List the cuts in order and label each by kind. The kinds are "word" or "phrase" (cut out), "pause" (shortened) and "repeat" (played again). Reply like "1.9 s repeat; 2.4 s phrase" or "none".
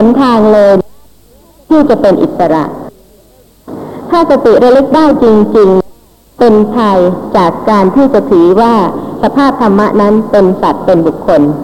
5.9 s pause